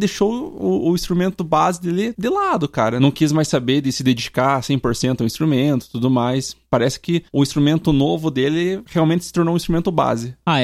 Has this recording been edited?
no; 0 cuts

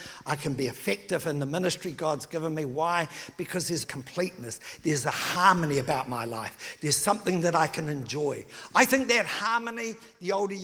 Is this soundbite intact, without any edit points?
no; 1 cut; at 3.8 s

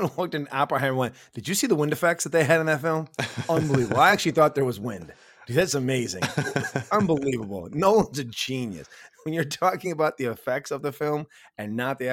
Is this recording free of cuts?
yes; 0 cuts

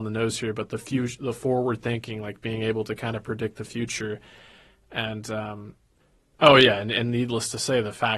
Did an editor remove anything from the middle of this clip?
no; 0 cuts

